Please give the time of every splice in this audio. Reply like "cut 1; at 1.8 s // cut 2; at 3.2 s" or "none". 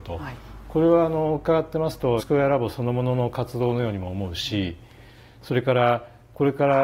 cut 1; at 2.2 s